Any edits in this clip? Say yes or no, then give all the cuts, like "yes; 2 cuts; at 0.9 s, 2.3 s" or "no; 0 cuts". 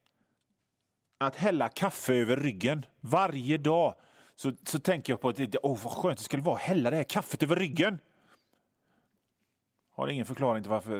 no; 0 cuts